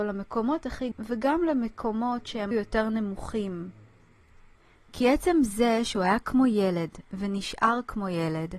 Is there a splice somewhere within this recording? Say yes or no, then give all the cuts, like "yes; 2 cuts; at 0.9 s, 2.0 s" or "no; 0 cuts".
yes; 2 cuts; at 0.9 s, 2.5 s